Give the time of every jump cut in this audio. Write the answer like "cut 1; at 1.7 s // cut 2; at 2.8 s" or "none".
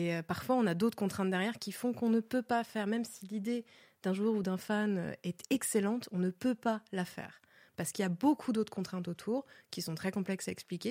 none